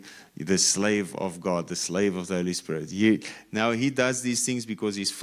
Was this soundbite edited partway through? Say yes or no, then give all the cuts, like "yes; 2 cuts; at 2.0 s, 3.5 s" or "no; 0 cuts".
no; 0 cuts